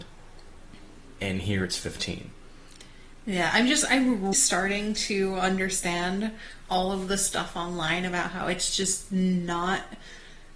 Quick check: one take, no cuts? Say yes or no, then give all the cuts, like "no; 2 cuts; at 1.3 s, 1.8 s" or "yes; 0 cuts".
no; 1 cut; at 4.3 s